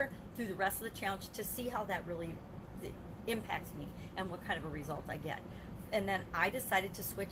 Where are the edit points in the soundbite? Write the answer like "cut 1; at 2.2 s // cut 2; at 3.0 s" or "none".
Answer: none

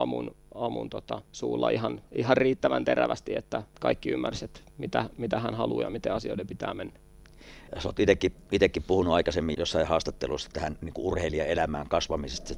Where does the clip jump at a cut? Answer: cut 1; at 1.2 s // cut 2; at 3.7 s // cut 3; at 4.7 s // cut 4; at 7.7 s // cut 5; at 9.5 s // cut 6; at 10.5 s

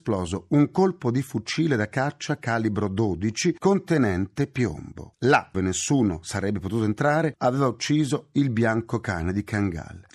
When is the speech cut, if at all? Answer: cut 1; at 5.5 s // cut 2; at 7.4 s

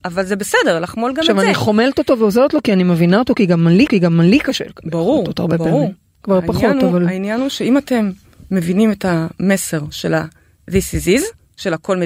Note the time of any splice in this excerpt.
cut 1; at 3.9 s

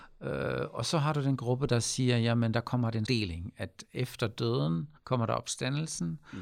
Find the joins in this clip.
cut 1; at 3.1 s // cut 2; at 5.0 s

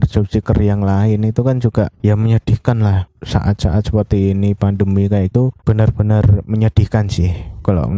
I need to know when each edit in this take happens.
cut 1; at 5.3 s

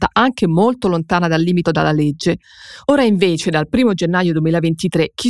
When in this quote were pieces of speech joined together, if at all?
cut 1; at 1.6 s

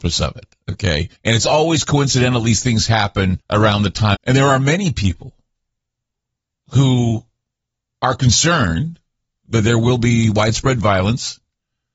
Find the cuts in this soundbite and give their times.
cut 1; at 1.2 s // cut 2; at 3.4 s // cut 3; at 4.1 s

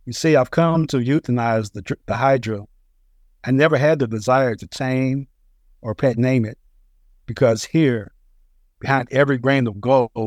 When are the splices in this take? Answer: none

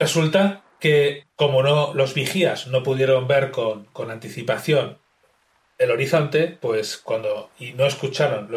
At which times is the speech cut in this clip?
cut 1; at 1.2 s

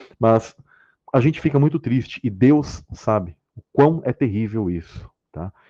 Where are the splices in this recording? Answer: none

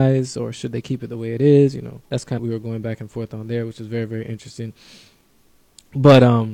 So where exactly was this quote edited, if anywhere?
cut 1; at 2.0 s // cut 2; at 2.4 s

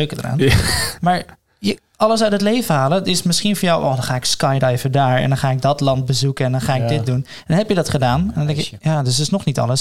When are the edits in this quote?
none

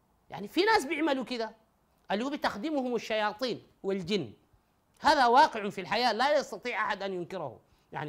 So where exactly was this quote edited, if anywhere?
none

